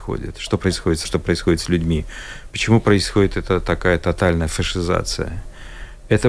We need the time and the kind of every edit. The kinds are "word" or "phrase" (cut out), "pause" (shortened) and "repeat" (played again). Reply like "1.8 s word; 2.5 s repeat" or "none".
1.0 s word